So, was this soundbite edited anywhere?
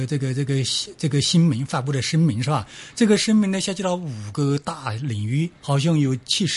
yes; 1 cut; at 5.6 s

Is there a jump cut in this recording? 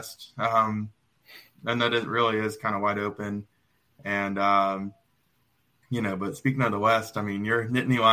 no; 0 cuts

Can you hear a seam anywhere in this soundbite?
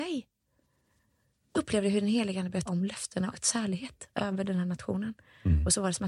yes; 3 cuts; at 1.5 s, 2.7 s, 3.3 s

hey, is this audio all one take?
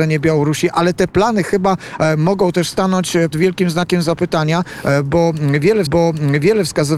no; 2 cuts; at 3.3 s, 5.9 s

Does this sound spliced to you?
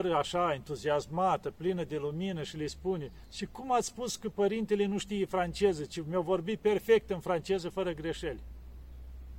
no; 0 cuts

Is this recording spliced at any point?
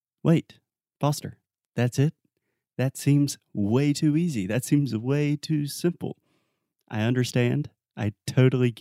no; 0 cuts

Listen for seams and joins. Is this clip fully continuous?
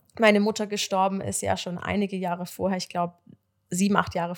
yes; 0 cuts

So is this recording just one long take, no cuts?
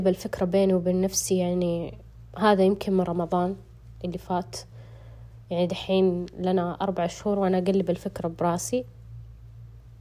yes; 0 cuts

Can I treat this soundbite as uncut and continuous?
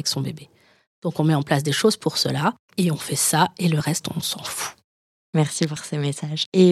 yes; 0 cuts

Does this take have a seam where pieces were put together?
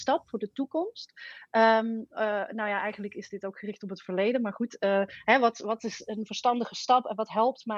no; 0 cuts

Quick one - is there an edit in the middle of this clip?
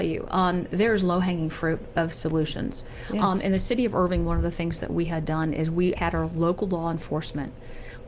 yes; 1 cut; at 5.9 s

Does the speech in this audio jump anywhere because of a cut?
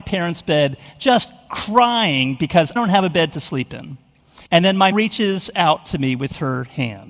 yes; 3 cuts; at 2.8 s, 4.5 s, 4.9 s

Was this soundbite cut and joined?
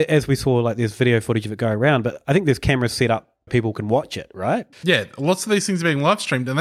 yes; 2 cuts; at 3.5 s, 4.7 s

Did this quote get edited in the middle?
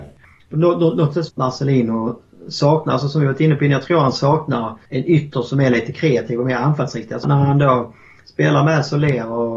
yes; 3 cuts; at 1.3 s, 4.8 s, 7.2 s

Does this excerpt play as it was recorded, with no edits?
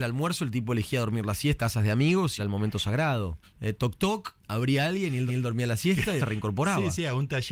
no; 6 cuts; at 1.6 s, 2.4 s, 3.4 s, 4.4 s, 5.3 s, 6.2 s

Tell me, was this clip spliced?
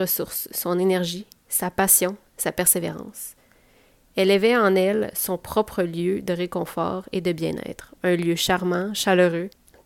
no; 0 cuts

